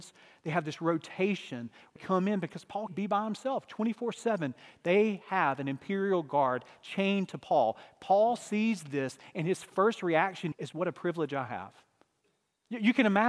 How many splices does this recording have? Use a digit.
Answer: 3